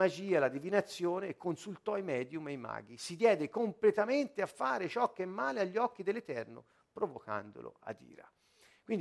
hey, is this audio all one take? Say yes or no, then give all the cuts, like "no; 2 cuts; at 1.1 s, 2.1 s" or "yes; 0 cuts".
yes; 0 cuts